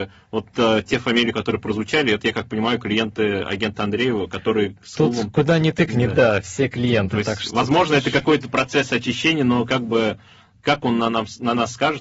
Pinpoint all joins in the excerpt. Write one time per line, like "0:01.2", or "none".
none